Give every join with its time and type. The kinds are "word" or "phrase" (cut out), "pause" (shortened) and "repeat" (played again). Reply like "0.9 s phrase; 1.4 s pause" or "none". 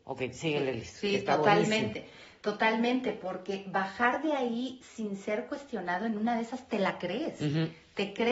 none